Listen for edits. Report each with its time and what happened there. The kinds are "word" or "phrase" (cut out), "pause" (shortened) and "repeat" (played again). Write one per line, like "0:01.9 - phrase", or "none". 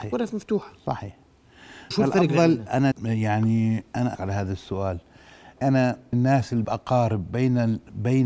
0:01.9 - word
0:02.9 - word
0:04.2 - word
0:05.6 - word
0:06.1 - word
0:06.6 - word

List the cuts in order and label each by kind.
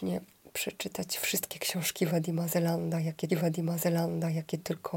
0:03.3 - repeat

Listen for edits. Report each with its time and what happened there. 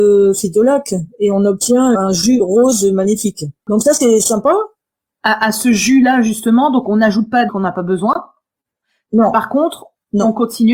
0:01.9 - word
0:03.6 - pause
0:07.5 - phrase

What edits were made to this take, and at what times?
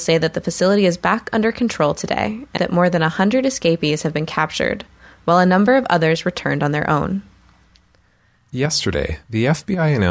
0:02.6 - word

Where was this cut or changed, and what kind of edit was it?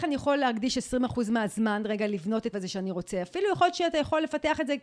0:02.5 - word

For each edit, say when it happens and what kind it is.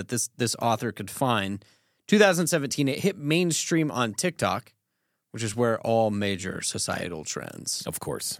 none

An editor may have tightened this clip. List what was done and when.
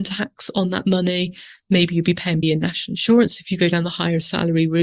0:02.4 - word

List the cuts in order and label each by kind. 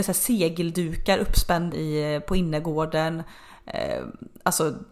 0:01.7 - word

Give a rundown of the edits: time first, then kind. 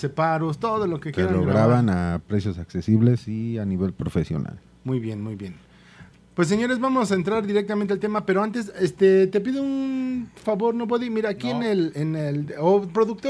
none

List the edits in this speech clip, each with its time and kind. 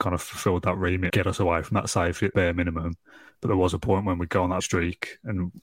0:01.1 - word
0:02.3 - phrase
0:04.6 - word

